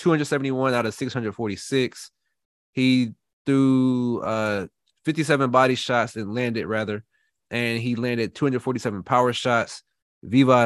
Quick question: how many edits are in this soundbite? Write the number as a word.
zero